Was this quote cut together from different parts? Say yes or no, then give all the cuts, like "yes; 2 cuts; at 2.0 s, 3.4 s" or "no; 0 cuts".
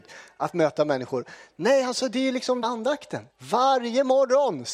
yes; 2 cuts; at 2.6 s, 3.3 s